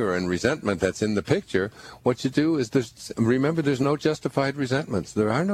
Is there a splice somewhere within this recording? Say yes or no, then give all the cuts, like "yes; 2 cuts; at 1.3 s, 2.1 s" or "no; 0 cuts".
no; 0 cuts